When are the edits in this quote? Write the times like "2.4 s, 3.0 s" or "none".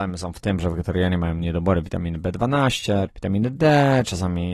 3.1 s